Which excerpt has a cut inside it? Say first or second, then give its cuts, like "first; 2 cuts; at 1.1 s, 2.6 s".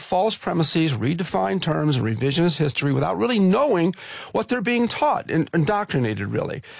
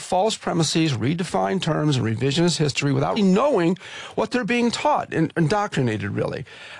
second; 1 cut; at 3.2 s